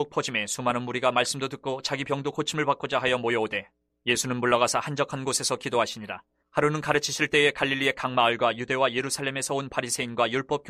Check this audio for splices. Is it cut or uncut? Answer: uncut